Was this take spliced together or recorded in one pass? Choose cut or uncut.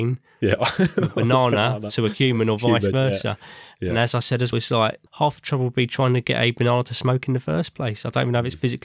cut